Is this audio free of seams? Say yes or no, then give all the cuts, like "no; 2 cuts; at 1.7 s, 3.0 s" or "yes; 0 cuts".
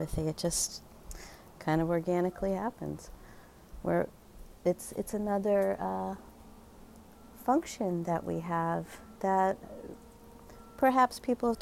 no; 1 cut; at 9.2 s